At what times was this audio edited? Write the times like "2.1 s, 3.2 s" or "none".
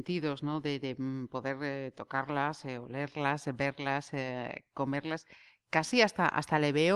none